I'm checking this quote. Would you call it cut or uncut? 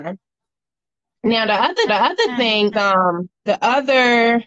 cut